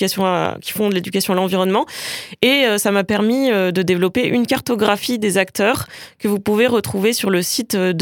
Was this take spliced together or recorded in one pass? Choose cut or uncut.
uncut